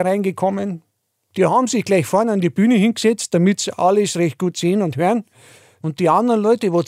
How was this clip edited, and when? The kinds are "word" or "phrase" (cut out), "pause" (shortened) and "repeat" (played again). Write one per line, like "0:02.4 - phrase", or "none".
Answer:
none